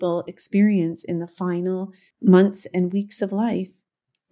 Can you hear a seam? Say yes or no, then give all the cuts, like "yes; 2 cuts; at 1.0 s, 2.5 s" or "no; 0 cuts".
no; 0 cuts